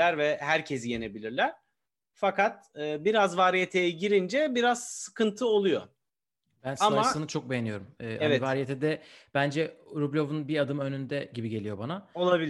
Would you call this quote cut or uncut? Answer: uncut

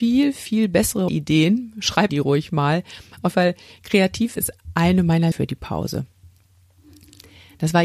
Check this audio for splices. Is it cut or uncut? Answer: cut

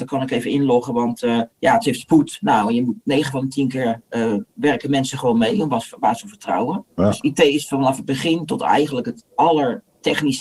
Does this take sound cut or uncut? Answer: cut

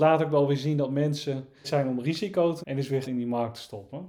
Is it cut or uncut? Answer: cut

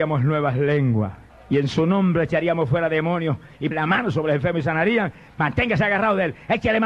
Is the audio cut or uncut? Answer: cut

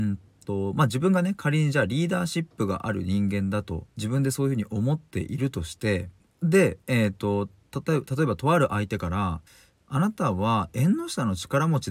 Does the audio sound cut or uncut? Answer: cut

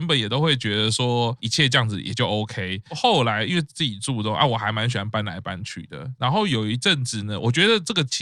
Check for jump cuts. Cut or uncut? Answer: uncut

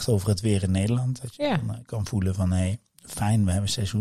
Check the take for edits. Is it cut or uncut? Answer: uncut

